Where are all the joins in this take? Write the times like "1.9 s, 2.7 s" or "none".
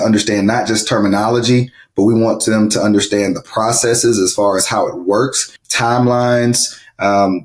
5.6 s